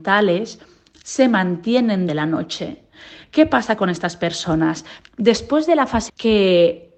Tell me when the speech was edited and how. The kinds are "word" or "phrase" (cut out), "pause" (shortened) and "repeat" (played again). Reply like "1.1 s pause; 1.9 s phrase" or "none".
2.1 s word; 6.1 s word